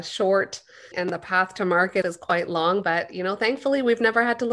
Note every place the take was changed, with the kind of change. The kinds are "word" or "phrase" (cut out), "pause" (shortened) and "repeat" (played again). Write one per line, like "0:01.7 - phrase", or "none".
0:00.9 - word
0:02.0 - word